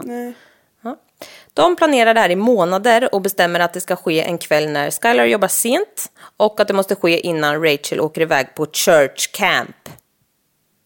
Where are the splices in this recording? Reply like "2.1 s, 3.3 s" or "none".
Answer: none

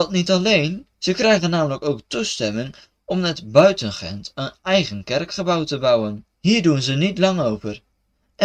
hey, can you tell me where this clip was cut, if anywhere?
0.9 s, 6.3 s

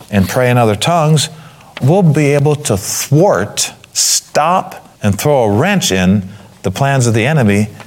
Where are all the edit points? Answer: 1.8 s, 4.9 s

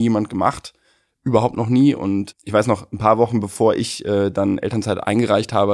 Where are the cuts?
2.3 s

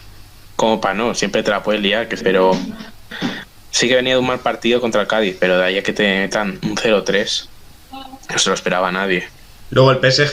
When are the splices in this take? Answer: 2.2 s

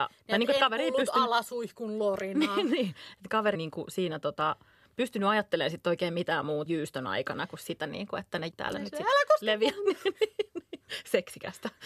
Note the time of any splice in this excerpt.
3.5 s, 6.7 s, 8.5 s

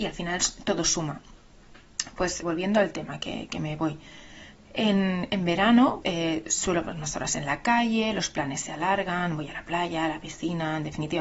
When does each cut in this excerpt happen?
2.4 s, 3.5 s, 6.0 s, 6.8 s

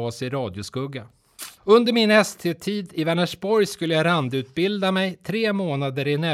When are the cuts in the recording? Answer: 1.6 s

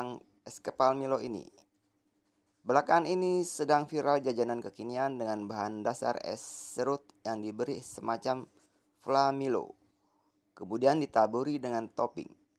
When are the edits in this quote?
none

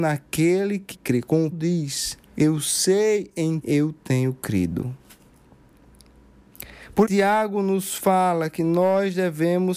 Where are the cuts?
0.9 s, 1.5 s, 2.3 s, 3.6 s, 7.0 s

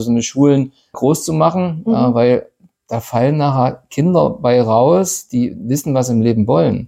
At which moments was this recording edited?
0.9 s

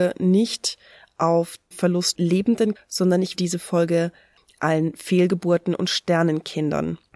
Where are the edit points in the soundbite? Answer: 1.7 s, 2.1 s, 2.7 s, 3.3 s

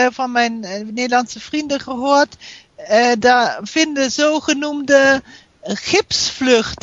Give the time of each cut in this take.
none

